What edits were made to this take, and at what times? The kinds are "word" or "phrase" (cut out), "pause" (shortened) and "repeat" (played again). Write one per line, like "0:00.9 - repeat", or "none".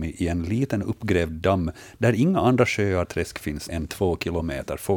0:03.0 - word
0:03.7 - word